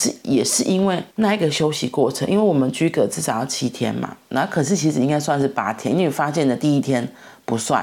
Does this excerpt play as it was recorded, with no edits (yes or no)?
no